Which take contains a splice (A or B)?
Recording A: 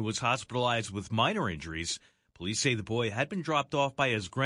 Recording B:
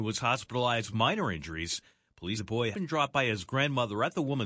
B